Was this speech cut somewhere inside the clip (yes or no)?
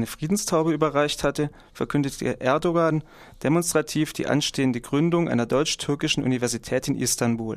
no